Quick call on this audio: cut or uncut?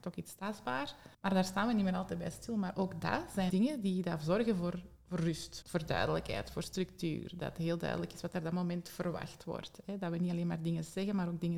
cut